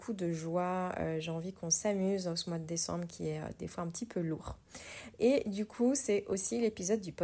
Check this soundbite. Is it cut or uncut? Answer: uncut